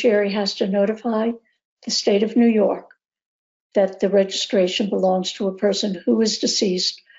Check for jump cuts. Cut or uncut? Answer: uncut